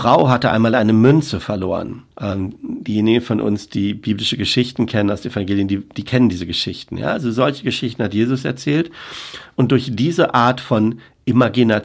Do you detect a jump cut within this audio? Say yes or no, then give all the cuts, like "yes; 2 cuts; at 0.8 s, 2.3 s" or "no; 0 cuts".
yes; 1 cut; at 2.1 s